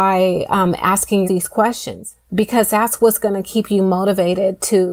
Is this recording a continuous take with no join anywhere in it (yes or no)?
no